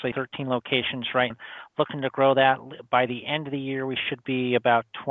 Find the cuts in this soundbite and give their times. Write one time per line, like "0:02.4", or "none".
0:01.3